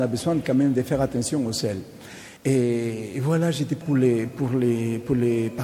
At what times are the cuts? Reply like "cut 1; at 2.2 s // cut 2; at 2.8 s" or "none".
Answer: cut 1; at 2.4 s // cut 2; at 3.8 s